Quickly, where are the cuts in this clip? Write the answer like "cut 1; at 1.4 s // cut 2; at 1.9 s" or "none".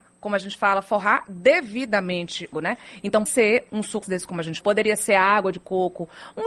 cut 1; at 2.5 s // cut 2; at 3.3 s // cut 3; at 4.0 s // cut 4; at 4.6 s